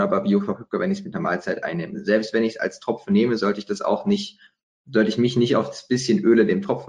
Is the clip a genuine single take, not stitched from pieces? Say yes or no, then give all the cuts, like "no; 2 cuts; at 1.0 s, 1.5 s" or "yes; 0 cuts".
yes; 0 cuts